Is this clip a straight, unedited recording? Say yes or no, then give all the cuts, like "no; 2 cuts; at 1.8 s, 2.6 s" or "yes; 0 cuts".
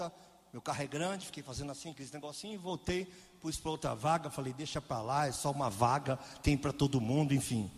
yes; 0 cuts